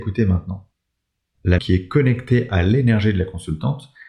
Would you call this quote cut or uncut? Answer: cut